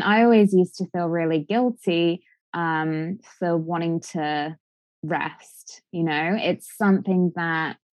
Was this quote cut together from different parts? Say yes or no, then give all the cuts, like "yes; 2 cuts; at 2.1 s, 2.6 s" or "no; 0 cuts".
no; 0 cuts